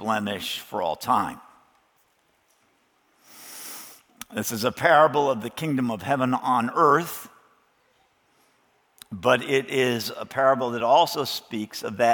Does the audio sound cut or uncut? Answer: uncut